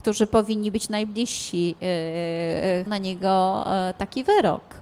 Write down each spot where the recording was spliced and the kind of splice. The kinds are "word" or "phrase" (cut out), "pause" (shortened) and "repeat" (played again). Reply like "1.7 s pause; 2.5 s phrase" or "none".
2.9 s phrase